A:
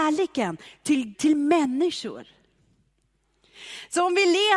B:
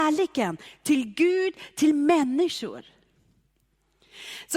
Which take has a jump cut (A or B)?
A